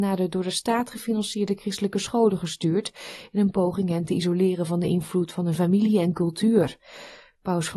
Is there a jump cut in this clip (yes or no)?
no